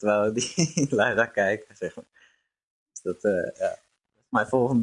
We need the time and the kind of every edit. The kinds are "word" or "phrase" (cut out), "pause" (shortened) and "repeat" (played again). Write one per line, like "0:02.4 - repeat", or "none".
none

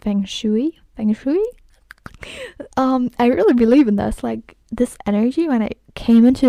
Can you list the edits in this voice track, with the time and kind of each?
0:02.7 - pause
0:04.6 - pause

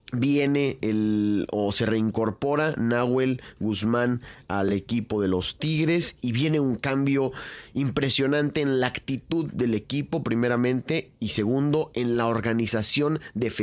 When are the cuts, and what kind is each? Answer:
none

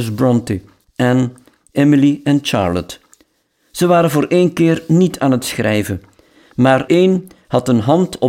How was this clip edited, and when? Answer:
0:06.9 - word

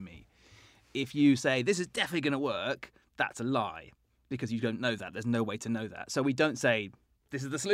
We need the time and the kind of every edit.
none

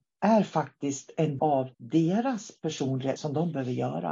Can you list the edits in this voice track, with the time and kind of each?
0:01.4 - word
0:01.7 - pause
0:03.2 - word

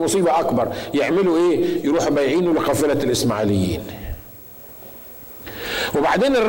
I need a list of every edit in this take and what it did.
none

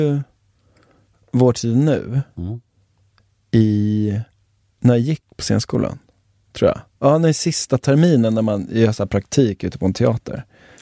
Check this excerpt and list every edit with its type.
none

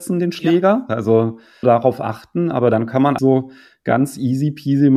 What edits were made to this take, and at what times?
0:01.6 - word
0:03.2 - word

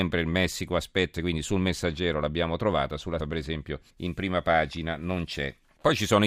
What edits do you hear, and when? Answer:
0:01.1 - word
0:03.2 - word
0:03.9 - pause

